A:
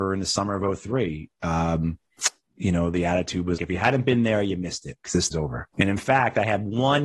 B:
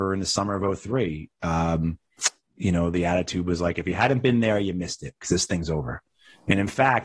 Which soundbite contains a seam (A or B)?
A